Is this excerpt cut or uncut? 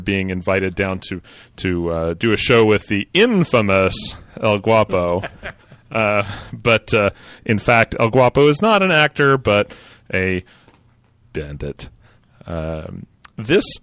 uncut